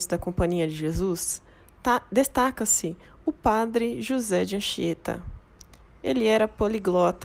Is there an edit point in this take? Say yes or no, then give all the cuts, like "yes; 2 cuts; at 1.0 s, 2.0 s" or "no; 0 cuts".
no; 0 cuts